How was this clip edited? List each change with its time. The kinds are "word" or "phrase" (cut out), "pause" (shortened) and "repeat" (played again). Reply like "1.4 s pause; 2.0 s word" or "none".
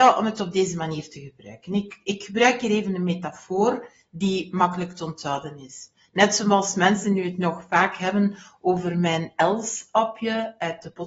none